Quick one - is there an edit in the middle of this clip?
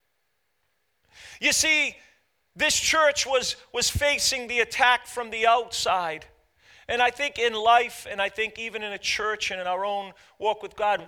no; 0 cuts

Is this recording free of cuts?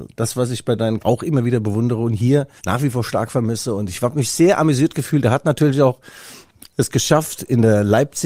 no; 2 cuts; at 1.0 s, 2.6 s

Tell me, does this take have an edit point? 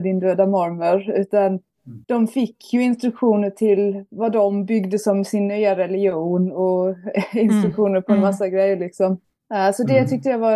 yes; 2 cuts; at 2.0 s, 9.2 s

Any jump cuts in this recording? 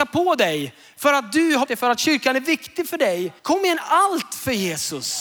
yes; 2 cuts; at 1.7 s, 3.4 s

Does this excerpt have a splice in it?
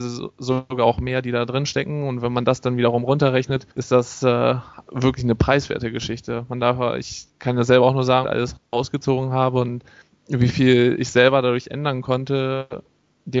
yes; 4 cuts; at 3.7 s, 7.3 s, 8.2 s, 10.0 s

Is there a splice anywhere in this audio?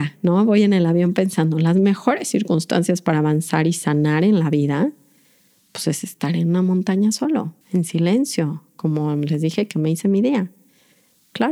yes; 1 cut; at 7.6 s

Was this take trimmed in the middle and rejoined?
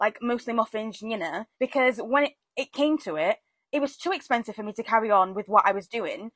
yes; 1 cut; at 1.5 s

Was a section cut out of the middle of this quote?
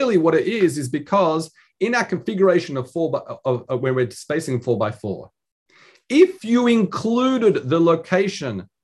no; 0 cuts

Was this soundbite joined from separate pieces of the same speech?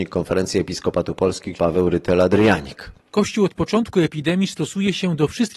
yes; 1 cut; at 1.5 s

